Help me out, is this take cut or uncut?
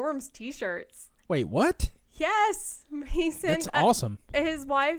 uncut